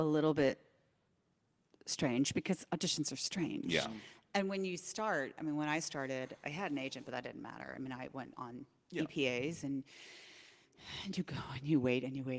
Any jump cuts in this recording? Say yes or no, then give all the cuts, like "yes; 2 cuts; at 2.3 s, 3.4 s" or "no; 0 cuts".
no; 0 cuts